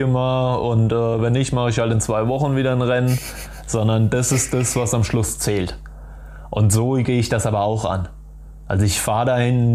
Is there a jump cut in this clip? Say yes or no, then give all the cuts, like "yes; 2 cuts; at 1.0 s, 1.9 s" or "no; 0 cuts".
no; 0 cuts